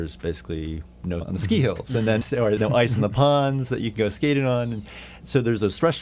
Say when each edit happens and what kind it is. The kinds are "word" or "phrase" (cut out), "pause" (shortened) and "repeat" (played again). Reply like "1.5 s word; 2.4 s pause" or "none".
1.2 s word; 2.2 s word; 2.6 s word